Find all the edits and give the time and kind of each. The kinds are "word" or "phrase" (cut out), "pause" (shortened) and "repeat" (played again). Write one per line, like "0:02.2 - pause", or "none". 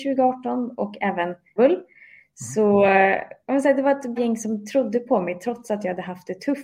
0:01.6 - word
0:04.2 - word